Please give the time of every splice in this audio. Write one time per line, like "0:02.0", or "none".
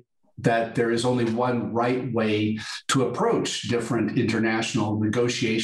none

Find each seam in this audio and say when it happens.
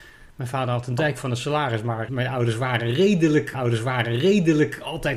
0:02.1
0:03.5

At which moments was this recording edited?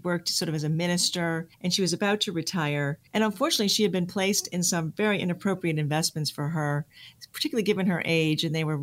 0:01.5
0:03.1

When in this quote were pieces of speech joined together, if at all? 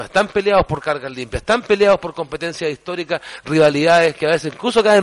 none

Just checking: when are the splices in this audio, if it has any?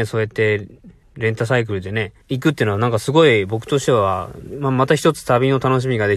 0:01.0
0:02.2

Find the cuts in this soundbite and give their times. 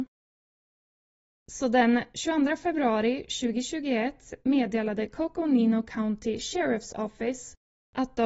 none

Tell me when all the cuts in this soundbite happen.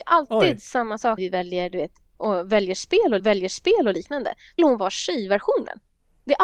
0:01.2
0:03.2
0:04.6

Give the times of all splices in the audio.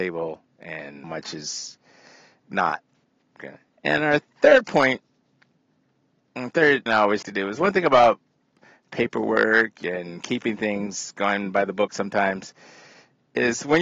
0:01.0
0:06.9
0:07.2

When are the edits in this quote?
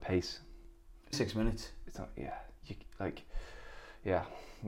0:01.1

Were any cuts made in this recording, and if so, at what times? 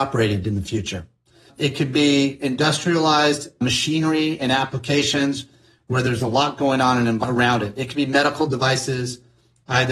none

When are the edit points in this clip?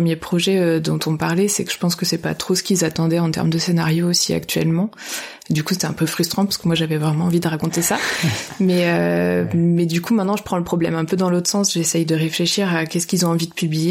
none

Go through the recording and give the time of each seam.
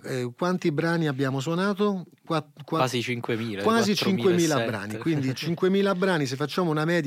none

